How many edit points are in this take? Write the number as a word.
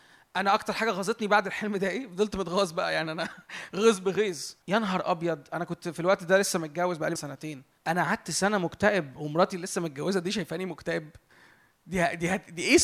three